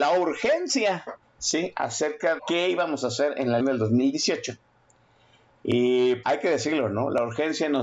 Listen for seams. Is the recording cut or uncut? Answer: cut